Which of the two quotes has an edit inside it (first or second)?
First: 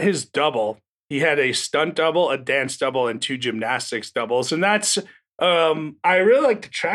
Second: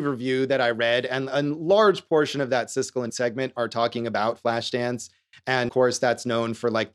second